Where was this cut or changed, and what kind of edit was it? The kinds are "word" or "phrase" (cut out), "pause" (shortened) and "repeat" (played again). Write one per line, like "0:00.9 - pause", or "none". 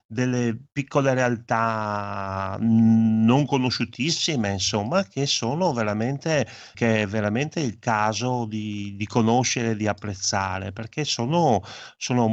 0:06.7 - word